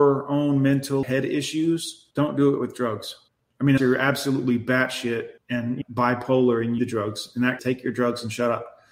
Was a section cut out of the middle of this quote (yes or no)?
yes